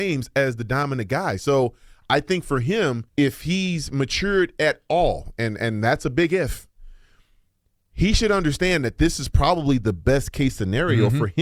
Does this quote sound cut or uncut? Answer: cut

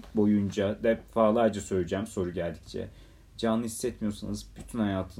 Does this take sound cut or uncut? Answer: uncut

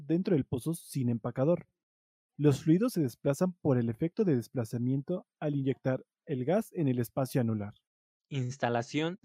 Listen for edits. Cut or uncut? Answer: uncut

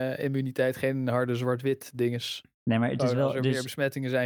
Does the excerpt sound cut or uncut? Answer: cut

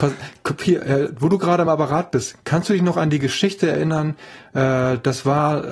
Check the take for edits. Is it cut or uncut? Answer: uncut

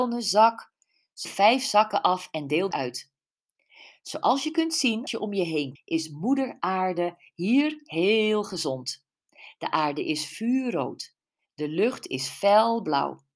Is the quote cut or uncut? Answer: cut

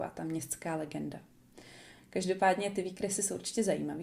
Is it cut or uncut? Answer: uncut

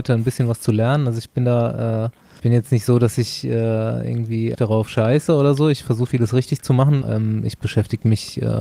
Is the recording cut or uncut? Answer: cut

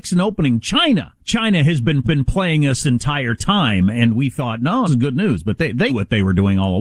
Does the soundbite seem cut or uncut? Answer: cut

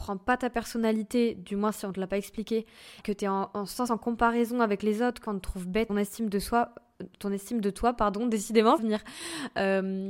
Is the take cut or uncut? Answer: cut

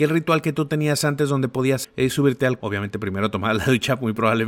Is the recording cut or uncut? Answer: cut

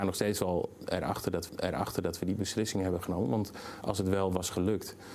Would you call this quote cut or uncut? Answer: cut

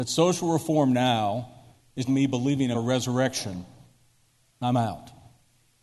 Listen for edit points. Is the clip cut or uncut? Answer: cut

